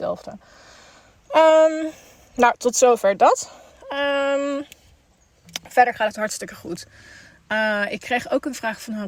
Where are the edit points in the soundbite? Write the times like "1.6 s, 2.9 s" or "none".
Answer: none